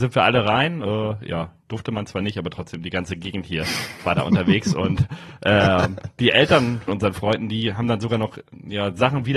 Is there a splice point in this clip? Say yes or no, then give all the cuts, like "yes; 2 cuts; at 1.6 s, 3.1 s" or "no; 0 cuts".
yes; 1 cut; at 6.9 s